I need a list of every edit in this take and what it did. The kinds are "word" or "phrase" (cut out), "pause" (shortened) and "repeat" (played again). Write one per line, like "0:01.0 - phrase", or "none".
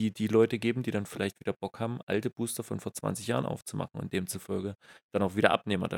none